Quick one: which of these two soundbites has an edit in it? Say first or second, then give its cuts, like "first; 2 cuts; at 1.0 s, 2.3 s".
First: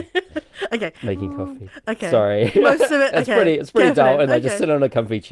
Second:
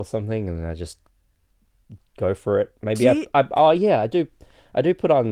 first; 1 cut; at 4.3 s